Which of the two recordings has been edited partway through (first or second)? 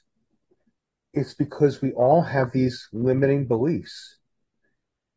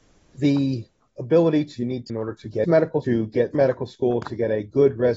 second